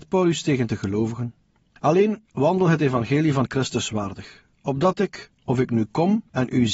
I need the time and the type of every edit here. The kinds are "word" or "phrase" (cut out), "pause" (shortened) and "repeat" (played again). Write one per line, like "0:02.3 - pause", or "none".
0:02.2 - pause